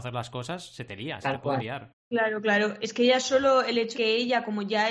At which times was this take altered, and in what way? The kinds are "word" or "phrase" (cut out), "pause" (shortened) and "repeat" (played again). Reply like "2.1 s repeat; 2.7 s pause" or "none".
3.9 s word